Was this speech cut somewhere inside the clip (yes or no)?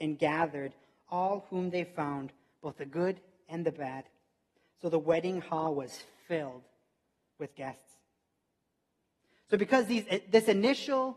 no